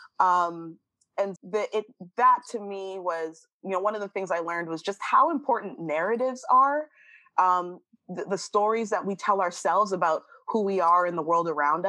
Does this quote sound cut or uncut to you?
cut